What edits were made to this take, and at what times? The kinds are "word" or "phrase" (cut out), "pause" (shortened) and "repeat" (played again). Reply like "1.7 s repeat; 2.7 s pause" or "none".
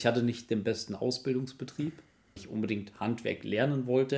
2.4 s word